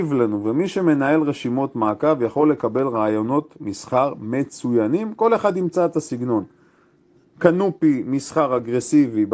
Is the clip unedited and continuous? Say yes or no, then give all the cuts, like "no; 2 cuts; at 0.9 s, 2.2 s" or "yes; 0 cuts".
yes; 0 cuts